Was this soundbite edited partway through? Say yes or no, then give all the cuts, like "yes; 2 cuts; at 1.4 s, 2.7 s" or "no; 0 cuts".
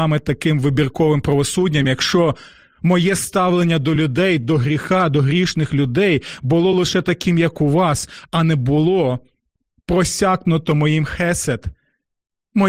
no; 0 cuts